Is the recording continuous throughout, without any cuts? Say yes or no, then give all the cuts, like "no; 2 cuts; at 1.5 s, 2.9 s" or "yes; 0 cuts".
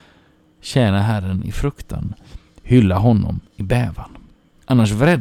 no; 1 cut; at 3.5 s